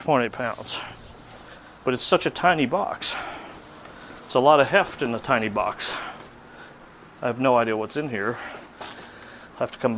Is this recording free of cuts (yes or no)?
no